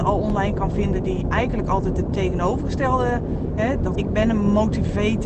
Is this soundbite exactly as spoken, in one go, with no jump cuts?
no; 1 cut; at 3.9 s

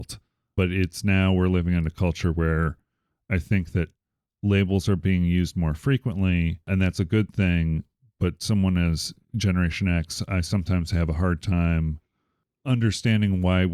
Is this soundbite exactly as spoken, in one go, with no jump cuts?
yes; 0 cuts

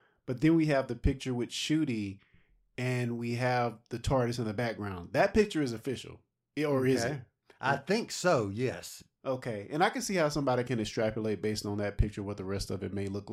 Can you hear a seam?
no; 0 cuts

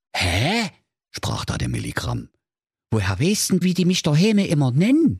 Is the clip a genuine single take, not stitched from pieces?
no; 1 cut; at 3.6 s

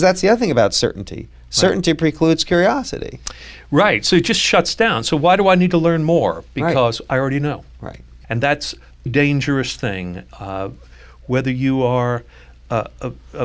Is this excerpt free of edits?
no; 2 cuts; at 8.2 s, 9.1 s

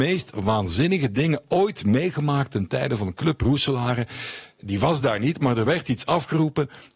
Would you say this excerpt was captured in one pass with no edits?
yes; 0 cuts

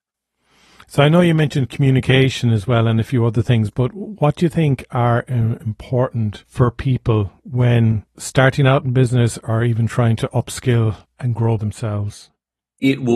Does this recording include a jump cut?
yes; 2 cuts; at 7.4 s, 11.6 s

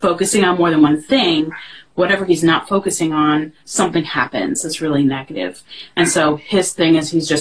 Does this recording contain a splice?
yes; 1 cut; at 3.6 s

